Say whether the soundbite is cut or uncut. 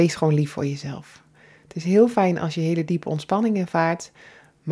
uncut